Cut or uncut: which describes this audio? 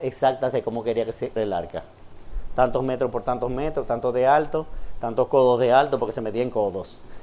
cut